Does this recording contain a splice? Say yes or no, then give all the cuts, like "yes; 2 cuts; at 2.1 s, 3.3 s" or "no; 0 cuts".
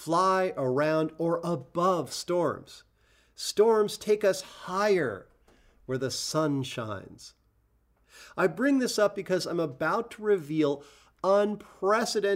no; 0 cuts